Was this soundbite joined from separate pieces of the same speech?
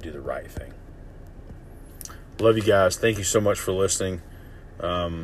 no; 0 cuts

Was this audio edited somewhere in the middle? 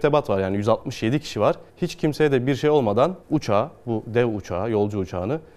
yes; 2 cuts; at 1.7 s, 3.2 s

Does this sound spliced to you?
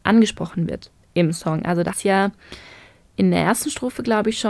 yes; 1 cut; at 1.9 s

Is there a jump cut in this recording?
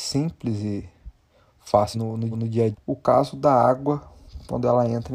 yes; 3 cuts; at 1.9 s, 2.3 s, 2.7 s

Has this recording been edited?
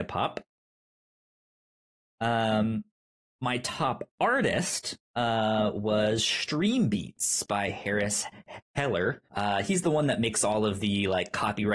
yes; 2 cuts; at 5.0 s, 9.3 s

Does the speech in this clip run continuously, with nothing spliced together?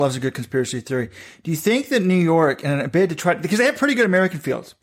yes; 0 cuts

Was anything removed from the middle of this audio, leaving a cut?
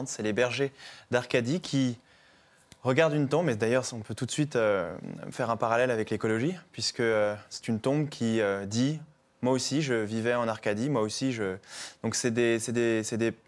no; 0 cuts

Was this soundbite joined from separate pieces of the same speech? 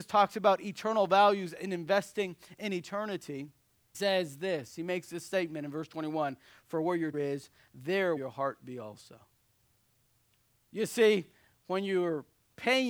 yes; 3 cuts; at 3.9 s, 7.1 s, 8.2 s

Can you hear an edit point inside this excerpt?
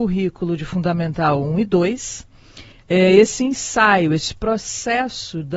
no; 0 cuts

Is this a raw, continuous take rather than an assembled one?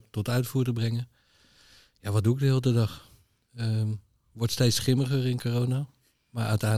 yes; 0 cuts

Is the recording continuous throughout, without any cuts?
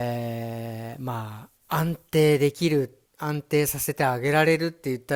no; 2 cuts; at 1.6 s, 3.1 s

